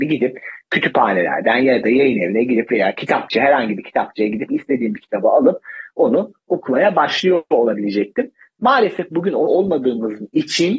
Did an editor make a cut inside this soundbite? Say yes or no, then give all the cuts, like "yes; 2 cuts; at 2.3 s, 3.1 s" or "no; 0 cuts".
yes; 1 cut; at 9.5 s